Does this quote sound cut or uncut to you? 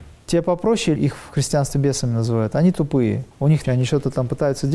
cut